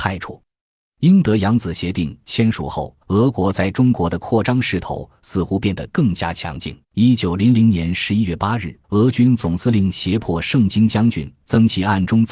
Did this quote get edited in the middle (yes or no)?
yes